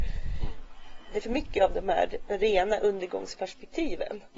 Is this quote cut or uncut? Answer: cut